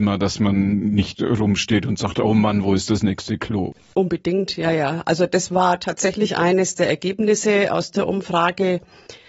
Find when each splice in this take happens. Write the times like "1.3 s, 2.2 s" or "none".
none